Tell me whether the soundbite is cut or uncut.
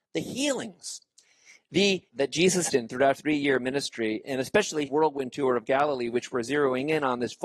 cut